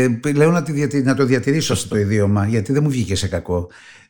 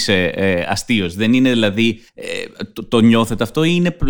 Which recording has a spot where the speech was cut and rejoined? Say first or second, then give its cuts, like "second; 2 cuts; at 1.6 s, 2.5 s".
second; 1 cut; at 2.1 s